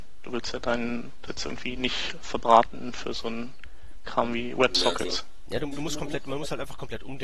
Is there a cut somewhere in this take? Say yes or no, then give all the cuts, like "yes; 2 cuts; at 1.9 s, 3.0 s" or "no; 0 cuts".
yes; 2 cuts; at 1.3 s, 5.7 s